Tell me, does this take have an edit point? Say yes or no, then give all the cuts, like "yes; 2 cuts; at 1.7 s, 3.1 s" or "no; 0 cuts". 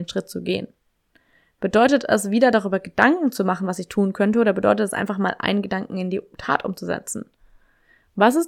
no; 0 cuts